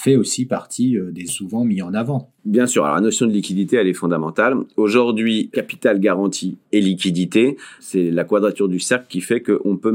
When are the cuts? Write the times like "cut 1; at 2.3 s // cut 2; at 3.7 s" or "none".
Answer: cut 1; at 1.3 s // cut 2; at 2.4 s // cut 3; at 6.6 s

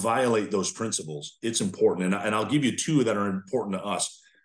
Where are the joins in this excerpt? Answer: none

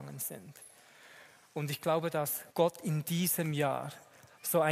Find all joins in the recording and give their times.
cut 1; at 2.5 s

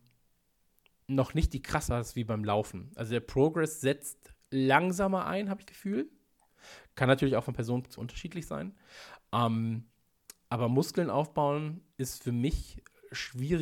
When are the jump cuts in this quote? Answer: cut 1; at 1.9 s // cut 2; at 4.4 s // cut 3; at 5.6 s // cut 4; at 8.0 s

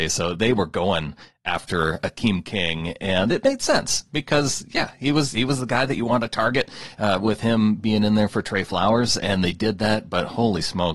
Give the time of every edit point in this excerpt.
none

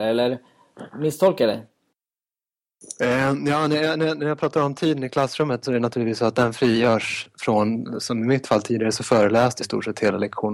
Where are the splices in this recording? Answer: cut 1; at 0.9 s // cut 2; at 5.6 s // cut 3; at 9.6 s

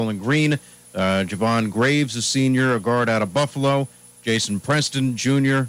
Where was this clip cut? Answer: none

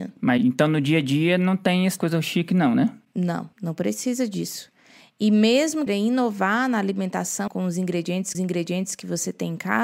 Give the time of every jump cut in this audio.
cut 1; at 2.0 s // cut 2; at 3.5 s // cut 3; at 5.9 s // cut 4; at 7.5 s // cut 5; at 8.3 s

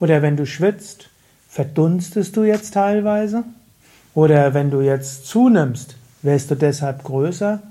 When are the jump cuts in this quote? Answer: none

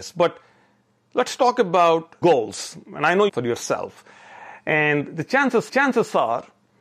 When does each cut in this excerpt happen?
cut 1; at 2.2 s // cut 2; at 3.3 s // cut 3; at 5.7 s

